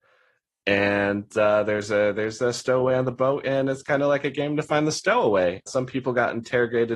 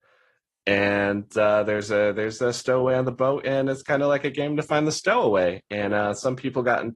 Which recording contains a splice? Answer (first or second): first